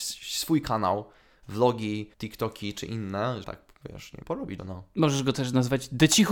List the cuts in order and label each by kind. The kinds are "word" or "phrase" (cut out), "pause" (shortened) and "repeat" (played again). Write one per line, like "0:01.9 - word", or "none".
0:02.1 - pause
0:03.4 - phrase
0:04.2 - word
0:04.6 - word